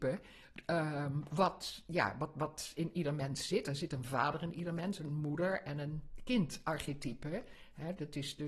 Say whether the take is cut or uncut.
uncut